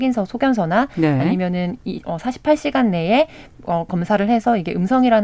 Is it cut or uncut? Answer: cut